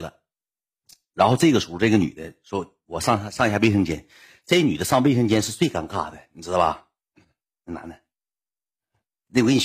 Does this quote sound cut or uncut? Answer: uncut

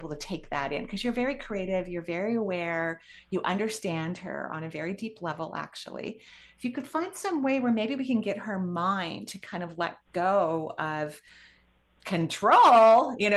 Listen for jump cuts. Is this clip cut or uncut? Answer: uncut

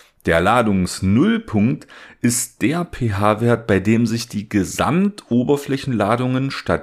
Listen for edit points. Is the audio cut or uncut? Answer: uncut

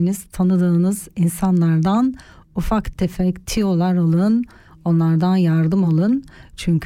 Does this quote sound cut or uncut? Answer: uncut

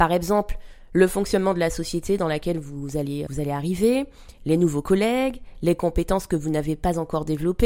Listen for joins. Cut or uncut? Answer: cut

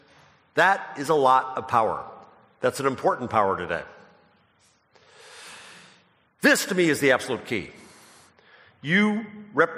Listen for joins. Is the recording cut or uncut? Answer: uncut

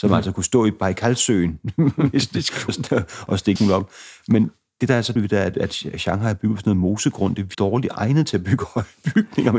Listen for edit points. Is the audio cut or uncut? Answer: cut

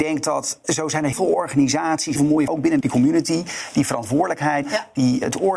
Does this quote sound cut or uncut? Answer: cut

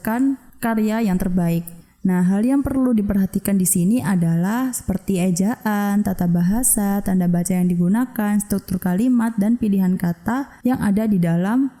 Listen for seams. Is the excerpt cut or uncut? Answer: uncut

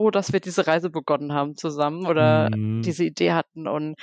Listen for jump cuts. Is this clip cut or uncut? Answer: uncut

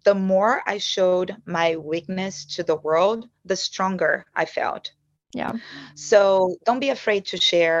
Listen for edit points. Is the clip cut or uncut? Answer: uncut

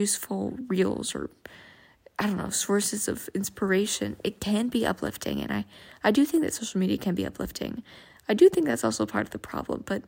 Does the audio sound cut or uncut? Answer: uncut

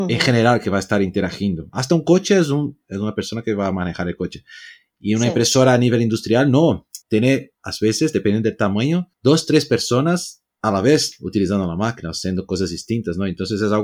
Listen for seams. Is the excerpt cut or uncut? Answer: cut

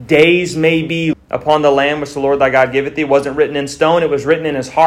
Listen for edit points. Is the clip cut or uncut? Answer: cut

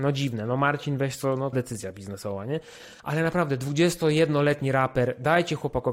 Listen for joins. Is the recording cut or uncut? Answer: cut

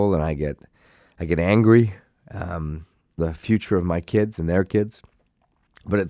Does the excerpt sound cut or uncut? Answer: cut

